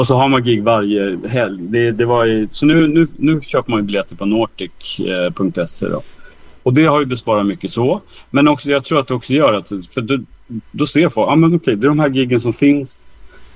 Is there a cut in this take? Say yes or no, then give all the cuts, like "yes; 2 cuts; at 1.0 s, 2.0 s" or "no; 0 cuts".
no; 0 cuts